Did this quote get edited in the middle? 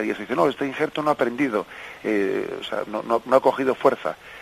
no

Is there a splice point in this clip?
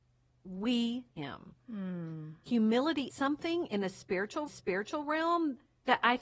yes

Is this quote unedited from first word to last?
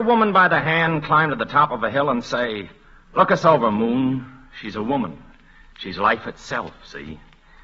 yes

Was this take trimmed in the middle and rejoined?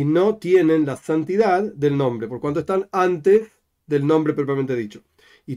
no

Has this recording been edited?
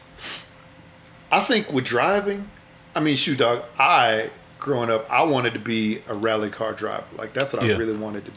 no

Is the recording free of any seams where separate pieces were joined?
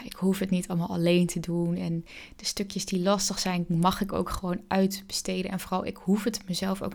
yes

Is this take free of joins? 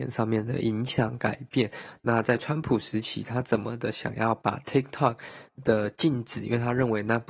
yes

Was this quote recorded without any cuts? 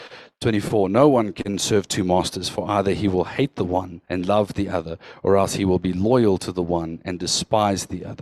no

